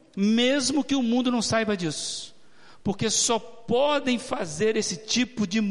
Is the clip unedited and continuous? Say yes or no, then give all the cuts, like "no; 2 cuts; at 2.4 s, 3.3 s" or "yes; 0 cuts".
yes; 0 cuts